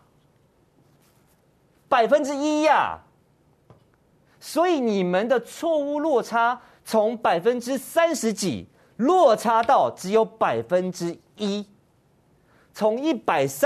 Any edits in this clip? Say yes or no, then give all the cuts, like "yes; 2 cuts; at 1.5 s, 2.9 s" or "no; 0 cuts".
no; 0 cuts